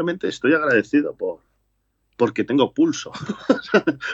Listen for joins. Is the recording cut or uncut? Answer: uncut